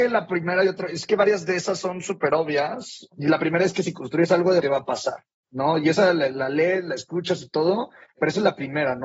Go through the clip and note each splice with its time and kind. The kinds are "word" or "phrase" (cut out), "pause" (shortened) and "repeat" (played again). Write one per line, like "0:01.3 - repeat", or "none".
0:04.6 - phrase